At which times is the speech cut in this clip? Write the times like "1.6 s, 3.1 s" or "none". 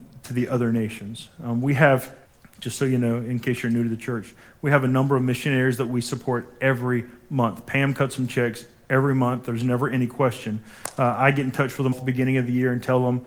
2.3 s, 11.9 s